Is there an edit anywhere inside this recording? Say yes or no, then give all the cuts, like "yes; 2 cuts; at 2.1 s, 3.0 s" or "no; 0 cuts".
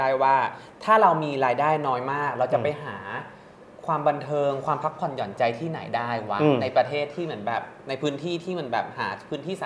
no; 0 cuts